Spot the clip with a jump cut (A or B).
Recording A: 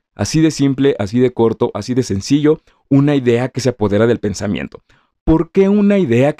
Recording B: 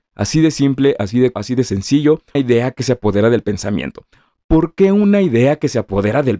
B